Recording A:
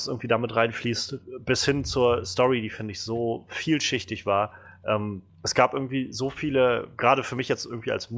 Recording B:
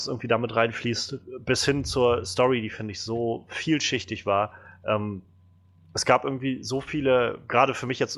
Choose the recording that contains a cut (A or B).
A